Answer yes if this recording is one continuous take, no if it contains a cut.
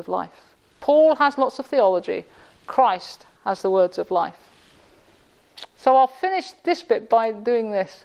yes